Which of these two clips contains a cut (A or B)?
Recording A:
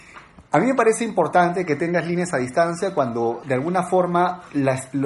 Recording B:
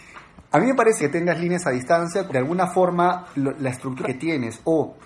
B